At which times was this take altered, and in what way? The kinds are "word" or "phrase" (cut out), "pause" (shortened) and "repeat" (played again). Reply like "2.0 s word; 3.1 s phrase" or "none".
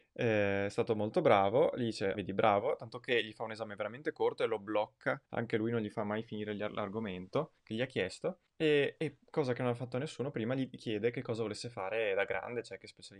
2.1 s word; 5.3 s pause; 7.6 s pause; 8.5 s pause

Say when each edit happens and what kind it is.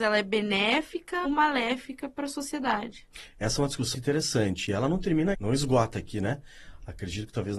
1.2 s word; 3.9 s word; 5.3 s word

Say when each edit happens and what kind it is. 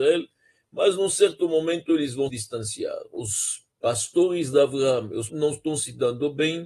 2.3 s word; 3.7 s pause; 5.3 s phrase

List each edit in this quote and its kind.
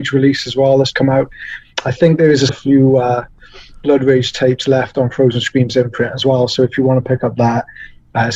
0.9 s word; 2.5 s word

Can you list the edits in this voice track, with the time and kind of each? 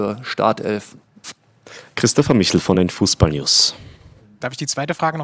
none

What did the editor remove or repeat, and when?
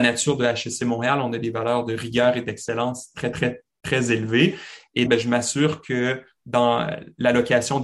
3.3 s word; 5.1 s word

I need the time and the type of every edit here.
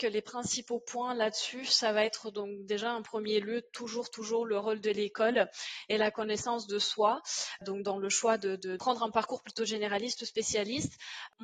none

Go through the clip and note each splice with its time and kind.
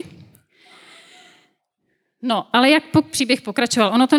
3.1 s word

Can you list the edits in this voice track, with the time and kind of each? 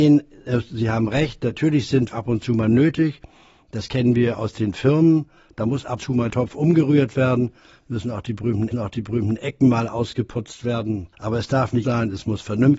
2.1 s word; 6.0 s word; 6.3 s word; 8.7 s repeat; 11.1 s pause; 11.8 s word

